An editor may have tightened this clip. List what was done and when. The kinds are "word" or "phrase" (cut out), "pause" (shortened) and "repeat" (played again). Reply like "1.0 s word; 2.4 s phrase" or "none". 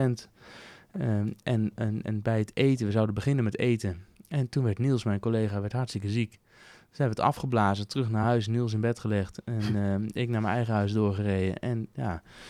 none